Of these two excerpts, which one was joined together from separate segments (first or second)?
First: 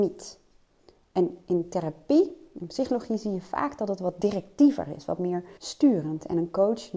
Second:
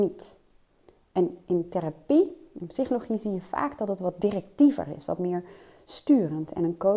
first